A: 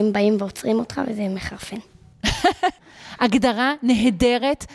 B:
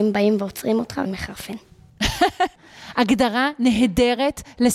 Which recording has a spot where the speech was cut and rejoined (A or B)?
B